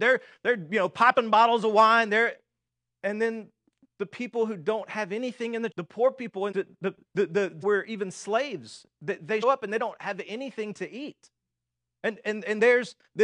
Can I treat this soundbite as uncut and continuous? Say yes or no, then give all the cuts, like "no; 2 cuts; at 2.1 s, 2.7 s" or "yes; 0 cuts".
no; 6 cuts; at 2.7 s, 5.7 s, 6.5 s, 7.0 s, 7.6 s, 9.4 s